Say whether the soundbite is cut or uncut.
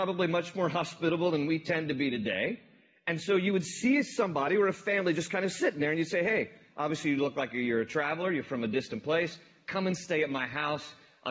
uncut